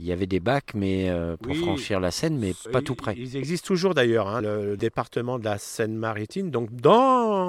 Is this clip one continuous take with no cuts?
no; 1 cut; at 4.4 s

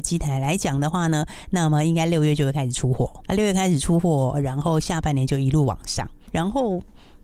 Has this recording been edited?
yes; 2 cuts; at 3.3 s, 6.3 s

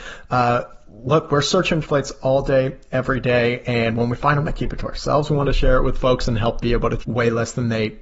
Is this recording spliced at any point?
yes; 5 cuts; at 1.8 s, 4.5 s, 5.4 s, 6.6 s, 7.0 s

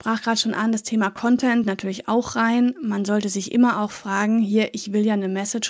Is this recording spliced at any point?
yes; 1 cut; at 1.6 s

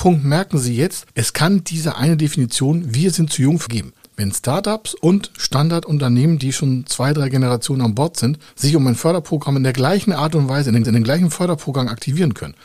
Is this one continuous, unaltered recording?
no; 3 cuts; at 3.7 s, 4.0 s, 10.8 s

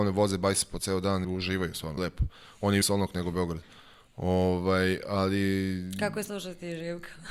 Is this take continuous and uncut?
no; 3 cuts; at 1.2 s, 2.0 s, 2.8 s

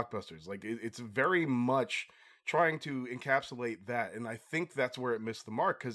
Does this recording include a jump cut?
no; 0 cuts

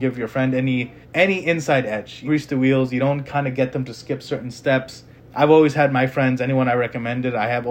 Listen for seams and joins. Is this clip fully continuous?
no; 3 cuts; at 1.0 s, 2.2 s, 5.2 s

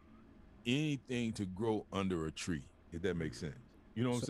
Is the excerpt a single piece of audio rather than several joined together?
yes; 0 cuts

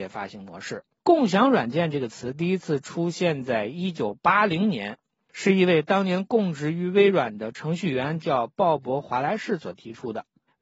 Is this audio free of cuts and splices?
yes; 0 cuts

